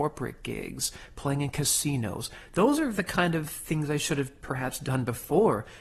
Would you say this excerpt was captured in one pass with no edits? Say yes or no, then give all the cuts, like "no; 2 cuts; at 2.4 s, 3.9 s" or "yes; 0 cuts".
yes; 0 cuts